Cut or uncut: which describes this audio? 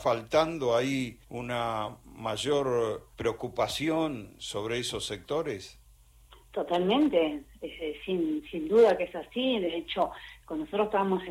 cut